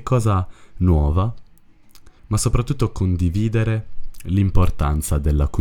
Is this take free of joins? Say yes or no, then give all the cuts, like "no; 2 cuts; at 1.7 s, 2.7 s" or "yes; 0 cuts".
no; 1 cut; at 2.2 s